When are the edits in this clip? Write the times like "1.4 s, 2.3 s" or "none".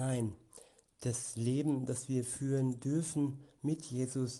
none

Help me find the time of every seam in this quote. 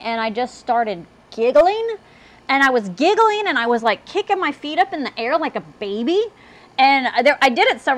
none

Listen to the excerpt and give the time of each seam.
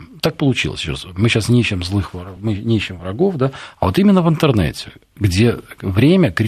none

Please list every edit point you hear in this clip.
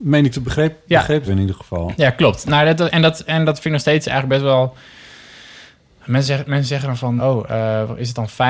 1.3 s, 7.2 s

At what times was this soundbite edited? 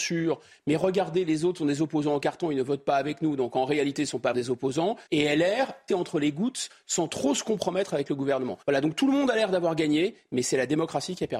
4.3 s, 5.1 s, 5.9 s, 8.6 s

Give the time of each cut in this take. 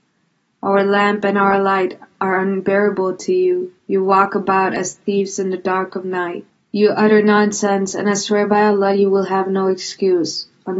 3.8 s, 6.5 s

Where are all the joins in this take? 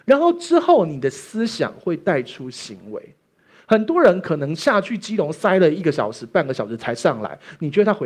none

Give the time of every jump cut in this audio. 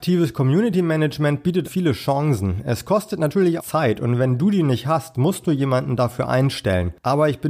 1.6 s, 3.6 s

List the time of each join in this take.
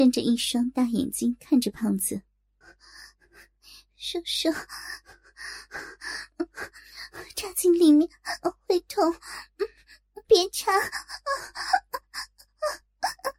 2.6 s, 10.2 s

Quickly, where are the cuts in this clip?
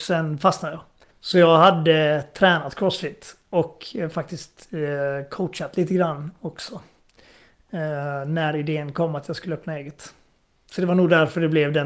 1.1 s

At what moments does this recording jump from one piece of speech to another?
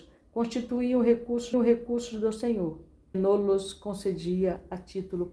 1.5 s, 3.1 s

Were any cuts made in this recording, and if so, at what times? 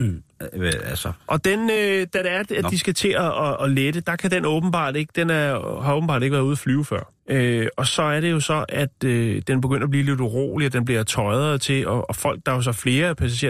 7.2 s

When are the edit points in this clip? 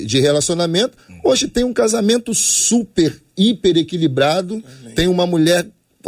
none

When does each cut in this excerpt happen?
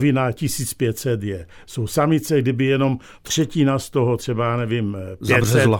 3.2 s

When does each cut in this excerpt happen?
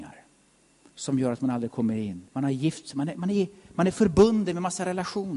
2.3 s

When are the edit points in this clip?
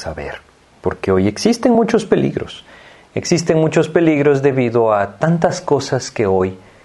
none

